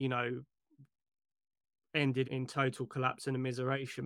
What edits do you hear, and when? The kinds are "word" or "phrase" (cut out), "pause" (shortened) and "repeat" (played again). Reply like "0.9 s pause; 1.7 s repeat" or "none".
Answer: 2.2 s word